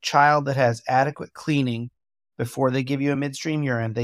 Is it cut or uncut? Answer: uncut